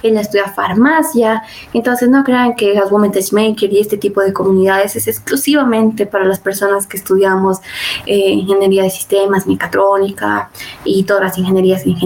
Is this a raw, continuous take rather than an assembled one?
yes; 0 cuts

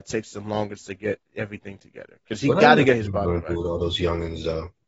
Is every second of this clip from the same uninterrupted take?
yes; 0 cuts

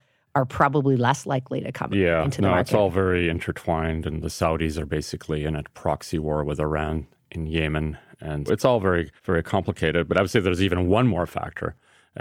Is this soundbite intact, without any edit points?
no; 2 cuts; at 8.5 s, 9.2 s

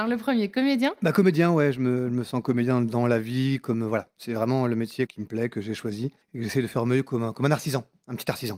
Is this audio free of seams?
no; 1 cut; at 6.2 s

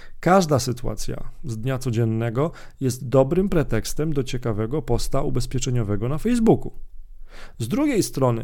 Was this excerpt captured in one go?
yes; 0 cuts

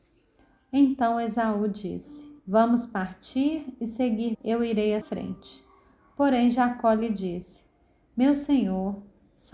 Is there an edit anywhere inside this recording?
yes; 3 cuts; at 2.4 s, 4.3 s, 5.0 s

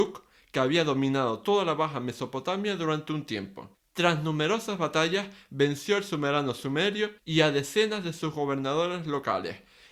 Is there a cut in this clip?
yes; 2 cuts; at 3.7 s, 7.2 s

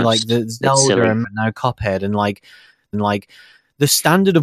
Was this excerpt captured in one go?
no; 2 cuts; at 1.2 s, 2.9 s

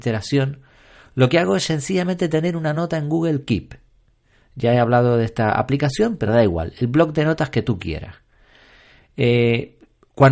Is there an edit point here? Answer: no; 0 cuts

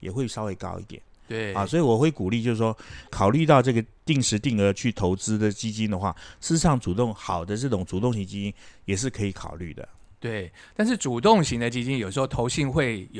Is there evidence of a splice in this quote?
no; 0 cuts

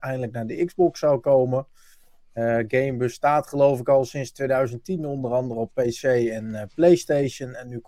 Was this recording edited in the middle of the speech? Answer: no; 0 cuts

